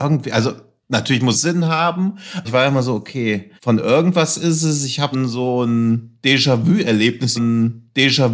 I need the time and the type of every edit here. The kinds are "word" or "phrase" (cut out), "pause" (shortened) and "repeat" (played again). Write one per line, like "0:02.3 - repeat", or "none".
0:01.3 - phrase
0:02.4 - word
0:03.6 - pause
0:05.1 - word
0:07.4 - repeat